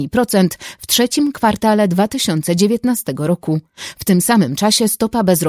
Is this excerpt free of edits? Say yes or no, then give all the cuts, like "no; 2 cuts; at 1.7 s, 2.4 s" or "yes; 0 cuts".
yes; 0 cuts